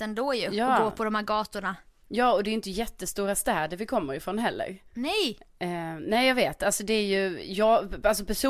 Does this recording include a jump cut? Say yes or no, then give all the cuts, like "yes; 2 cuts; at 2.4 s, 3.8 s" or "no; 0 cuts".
no; 0 cuts